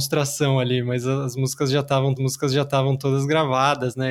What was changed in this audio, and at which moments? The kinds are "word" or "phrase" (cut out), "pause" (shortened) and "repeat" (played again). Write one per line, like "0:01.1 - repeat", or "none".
0:02.2 - repeat